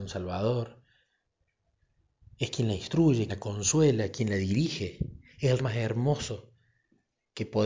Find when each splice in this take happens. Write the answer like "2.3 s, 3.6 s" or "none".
3.3 s, 5.6 s